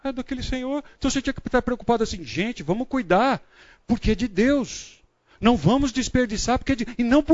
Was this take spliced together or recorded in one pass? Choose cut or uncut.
uncut